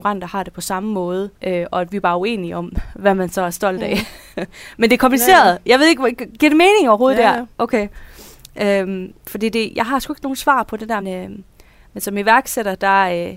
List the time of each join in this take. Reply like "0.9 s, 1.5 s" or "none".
1.4 s, 4.3 s, 6.2 s, 11.0 s